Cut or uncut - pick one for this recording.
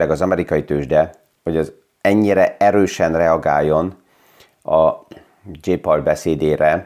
uncut